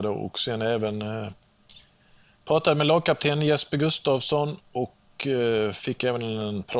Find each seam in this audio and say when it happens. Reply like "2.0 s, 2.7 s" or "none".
none